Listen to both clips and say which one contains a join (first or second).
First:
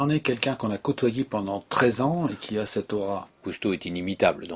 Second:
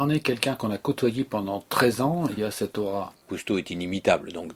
second